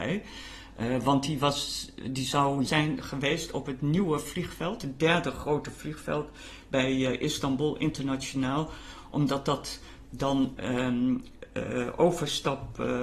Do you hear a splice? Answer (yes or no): yes